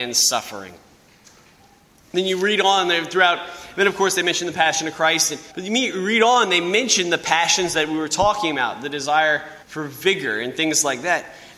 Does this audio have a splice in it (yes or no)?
yes